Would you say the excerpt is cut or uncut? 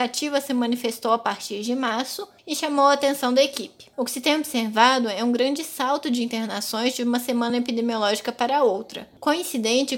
uncut